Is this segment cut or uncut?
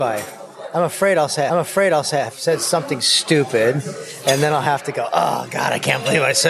cut